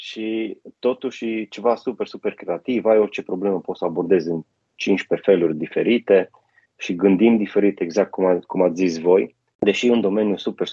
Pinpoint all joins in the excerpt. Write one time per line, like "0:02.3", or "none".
none